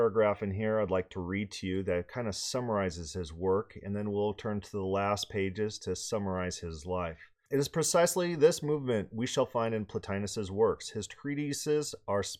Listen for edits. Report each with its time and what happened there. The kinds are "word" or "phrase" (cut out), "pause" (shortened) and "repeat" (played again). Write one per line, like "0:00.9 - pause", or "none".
none